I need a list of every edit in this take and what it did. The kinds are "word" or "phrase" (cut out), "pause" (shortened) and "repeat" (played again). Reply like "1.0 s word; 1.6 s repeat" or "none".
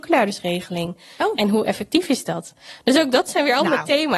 none